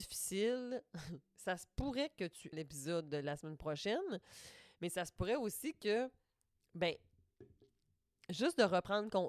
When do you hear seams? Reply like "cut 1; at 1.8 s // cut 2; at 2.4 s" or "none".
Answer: cut 1; at 2.5 s